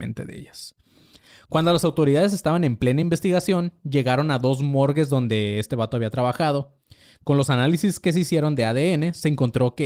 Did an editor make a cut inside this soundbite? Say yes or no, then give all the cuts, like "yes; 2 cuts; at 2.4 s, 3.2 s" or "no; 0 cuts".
no; 0 cuts